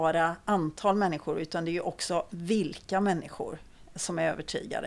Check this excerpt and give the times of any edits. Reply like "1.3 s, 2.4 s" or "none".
3.9 s